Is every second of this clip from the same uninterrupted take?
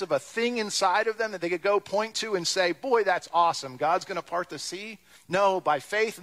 no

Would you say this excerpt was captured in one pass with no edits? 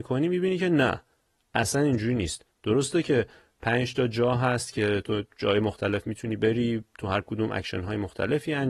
yes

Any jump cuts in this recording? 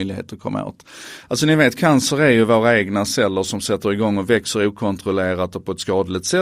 no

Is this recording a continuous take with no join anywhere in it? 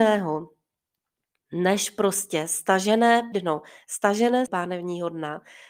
no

